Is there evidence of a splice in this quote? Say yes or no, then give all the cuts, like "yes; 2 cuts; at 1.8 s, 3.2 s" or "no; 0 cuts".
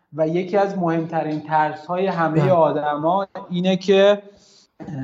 no; 0 cuts